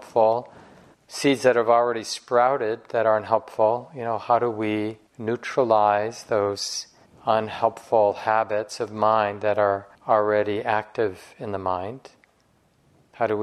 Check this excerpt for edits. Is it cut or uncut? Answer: cut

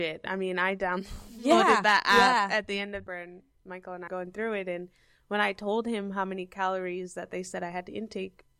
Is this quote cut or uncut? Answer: cut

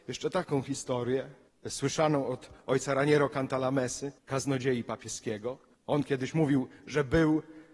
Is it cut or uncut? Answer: cut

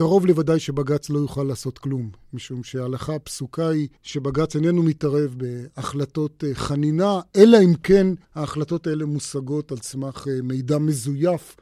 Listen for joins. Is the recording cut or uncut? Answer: cut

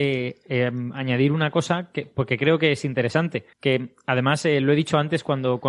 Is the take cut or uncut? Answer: cut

